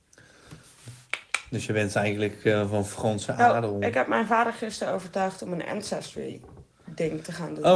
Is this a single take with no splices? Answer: yes; 0 cuts

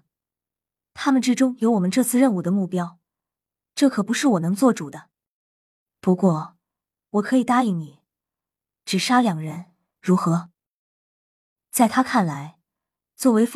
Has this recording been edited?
no; 0 cuts

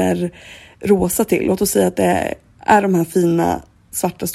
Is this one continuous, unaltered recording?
yes; 0 cuts

